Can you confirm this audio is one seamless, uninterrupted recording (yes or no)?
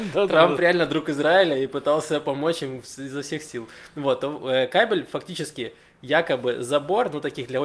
yes